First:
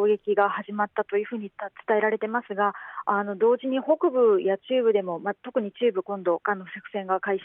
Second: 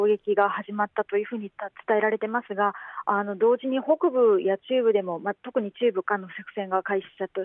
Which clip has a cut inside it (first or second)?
second